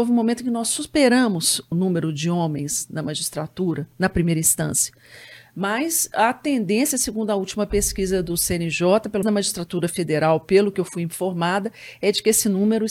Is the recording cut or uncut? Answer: cut